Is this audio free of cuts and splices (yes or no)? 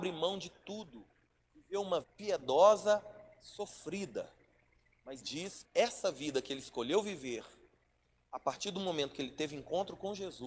no